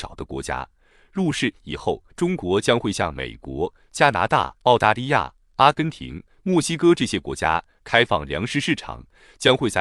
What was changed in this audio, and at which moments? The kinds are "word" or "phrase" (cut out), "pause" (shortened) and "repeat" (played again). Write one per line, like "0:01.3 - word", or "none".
0:02.1 - pause
0:04.5 - pause